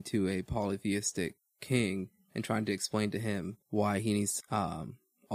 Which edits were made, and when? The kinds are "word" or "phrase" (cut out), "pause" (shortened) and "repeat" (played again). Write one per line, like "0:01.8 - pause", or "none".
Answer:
0:03.6 - pause
0:04.4 - word